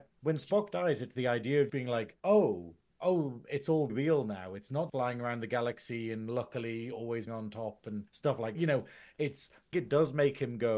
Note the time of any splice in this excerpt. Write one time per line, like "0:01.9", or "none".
0:01.7
0:02.2
0:03.9
0:04.9
0:07.3
0:08.1
0:08.5
0:09.7